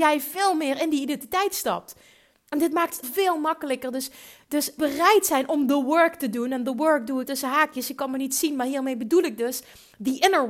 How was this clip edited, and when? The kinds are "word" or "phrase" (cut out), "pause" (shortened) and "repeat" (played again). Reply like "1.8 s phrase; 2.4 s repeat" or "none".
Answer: 3.0 s word; 4.8 s word; 7.2 s word

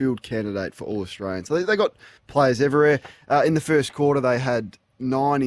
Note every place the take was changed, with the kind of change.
2.2 s pause

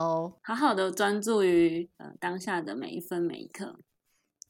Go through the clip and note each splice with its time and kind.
1.9 s pause

